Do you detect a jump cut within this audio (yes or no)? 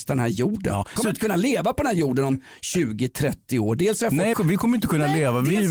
yes